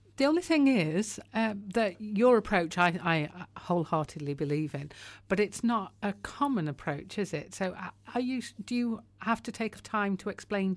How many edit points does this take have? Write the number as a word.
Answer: two